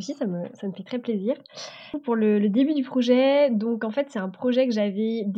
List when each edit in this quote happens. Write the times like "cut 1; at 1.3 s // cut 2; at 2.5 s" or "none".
none